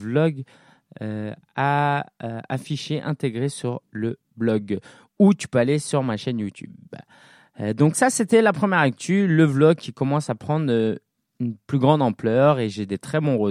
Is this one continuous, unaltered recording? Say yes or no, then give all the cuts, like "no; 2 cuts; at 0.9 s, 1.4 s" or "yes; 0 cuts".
yes; 0 cuts